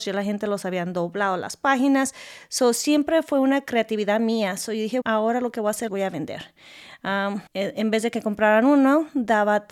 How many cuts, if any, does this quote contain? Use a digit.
3